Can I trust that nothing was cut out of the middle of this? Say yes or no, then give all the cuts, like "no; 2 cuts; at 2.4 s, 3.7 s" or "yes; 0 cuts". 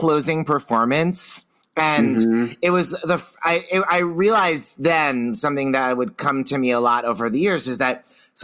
no; 1 cut; at 1.6 s